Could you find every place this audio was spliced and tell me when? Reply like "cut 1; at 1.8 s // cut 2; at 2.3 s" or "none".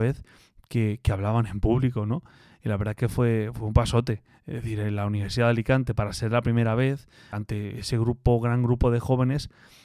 cut 1; at 7.3 s